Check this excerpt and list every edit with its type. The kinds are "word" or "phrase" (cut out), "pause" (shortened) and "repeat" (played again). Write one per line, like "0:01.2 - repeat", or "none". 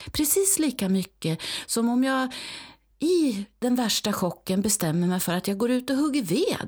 none

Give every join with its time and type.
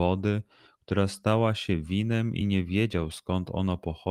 none

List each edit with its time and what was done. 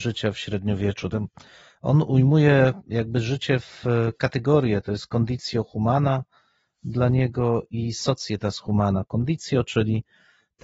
none

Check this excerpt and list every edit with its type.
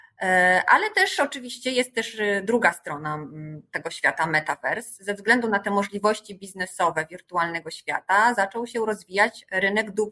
none

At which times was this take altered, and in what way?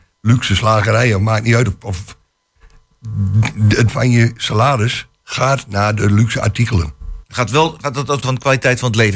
0:03.9 - phrase
0:07.2 - pause
0:08.2 - word

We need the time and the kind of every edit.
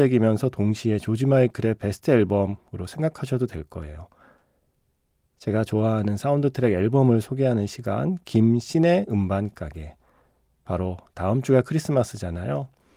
none

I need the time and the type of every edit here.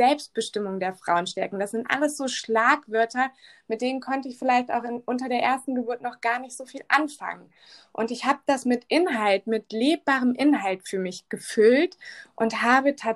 none

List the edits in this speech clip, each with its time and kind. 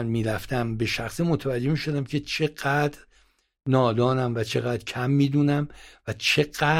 none

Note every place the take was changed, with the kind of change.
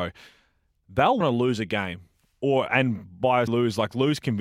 0:01.2 - word
0:03.5 - word

